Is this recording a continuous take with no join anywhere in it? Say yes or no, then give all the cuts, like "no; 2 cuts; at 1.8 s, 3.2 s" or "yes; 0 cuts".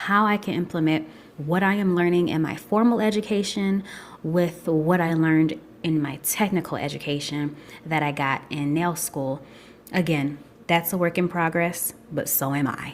yes; 0 cuts